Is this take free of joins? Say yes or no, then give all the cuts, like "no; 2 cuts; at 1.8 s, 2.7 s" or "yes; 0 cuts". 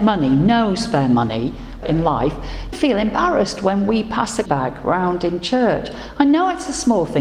no; 3 cuts; at 1.8 s, 2.7 s, 4.5 s